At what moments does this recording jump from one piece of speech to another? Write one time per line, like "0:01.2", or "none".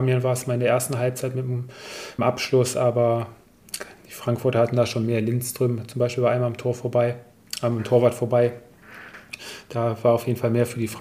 0:02.2